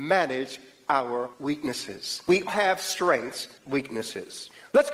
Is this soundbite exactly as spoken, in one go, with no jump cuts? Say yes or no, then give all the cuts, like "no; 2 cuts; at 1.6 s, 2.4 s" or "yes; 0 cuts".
no; 3 cuts; at 1.3 s, 2.5 s, 3.6 s